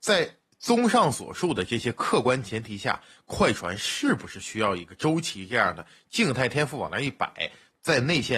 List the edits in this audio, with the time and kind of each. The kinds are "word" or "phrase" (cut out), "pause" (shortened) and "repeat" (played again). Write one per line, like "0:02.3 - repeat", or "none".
none